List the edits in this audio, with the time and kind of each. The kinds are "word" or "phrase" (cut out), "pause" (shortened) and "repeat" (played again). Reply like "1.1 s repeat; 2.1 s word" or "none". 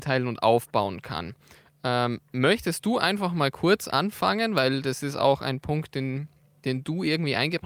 none